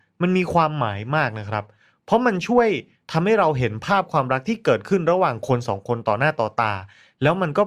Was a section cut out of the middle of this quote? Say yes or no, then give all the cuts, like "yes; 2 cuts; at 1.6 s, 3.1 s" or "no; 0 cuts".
no; 0 cuts